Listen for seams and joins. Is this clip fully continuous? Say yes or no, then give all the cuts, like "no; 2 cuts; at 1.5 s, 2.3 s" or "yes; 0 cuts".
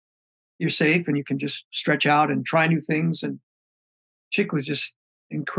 yes; 0 cuts